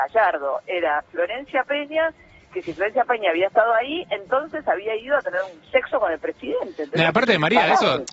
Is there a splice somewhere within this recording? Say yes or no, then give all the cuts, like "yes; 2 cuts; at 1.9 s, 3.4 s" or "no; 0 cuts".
no; 0 cuts